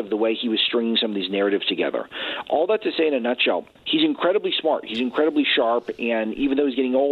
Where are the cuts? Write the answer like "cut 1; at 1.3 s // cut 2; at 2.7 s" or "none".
cut 1; at 3.8 s